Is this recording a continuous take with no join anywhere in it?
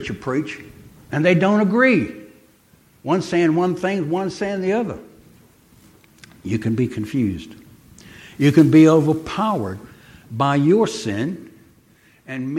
yes; 0 cuts

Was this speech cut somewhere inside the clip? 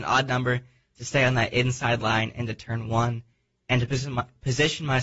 no; 0 cuts

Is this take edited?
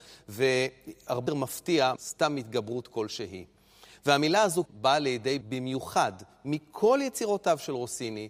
yes; 4 cuts; at 1.3 s, 2.0 s, 4.7 s, 5.4 s

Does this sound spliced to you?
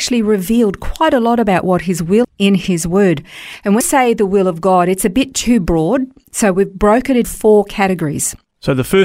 yes; 3 cuts; at 2.2 s, 3.8 s, 7.2 s

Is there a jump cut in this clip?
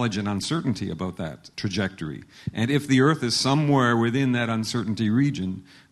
no; 0 cuts

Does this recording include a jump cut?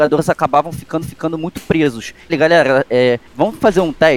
yes; 3 cuts; at 1.0 s, 2.3 s, 3.3 s

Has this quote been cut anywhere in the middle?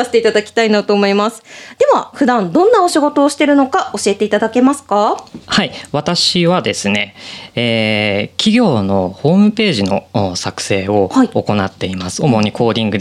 yes; 2 cuts; at 2.1 s, 5.4 s

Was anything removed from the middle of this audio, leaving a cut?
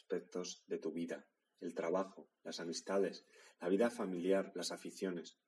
no; 0 cuts

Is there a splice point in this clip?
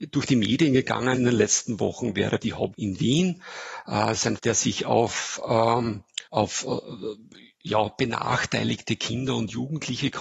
yes; 5 cuts; at 1.2 s, 2.4 s, 2.7 s, 4.4 s, 6.3 s

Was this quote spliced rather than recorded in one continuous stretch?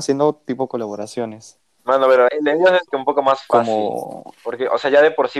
yes; 2 cuts; at 2.3 s, 2.9 s

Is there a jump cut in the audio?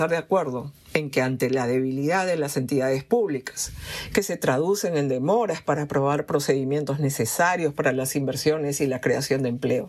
no; 0 cuts

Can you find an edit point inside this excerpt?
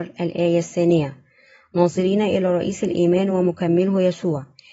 no; 0 cuts

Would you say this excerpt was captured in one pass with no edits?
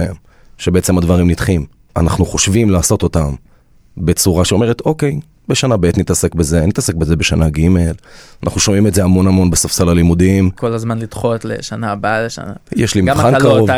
yes; 0 cuts

